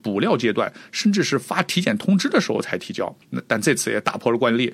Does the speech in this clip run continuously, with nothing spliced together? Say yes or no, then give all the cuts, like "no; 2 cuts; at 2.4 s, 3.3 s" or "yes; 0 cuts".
no; 1 cut; at 3.2 s